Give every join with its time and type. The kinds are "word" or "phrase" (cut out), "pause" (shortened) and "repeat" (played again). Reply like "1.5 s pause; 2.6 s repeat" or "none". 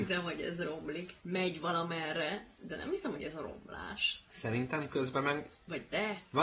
1.2 s pause; 4.3 s pause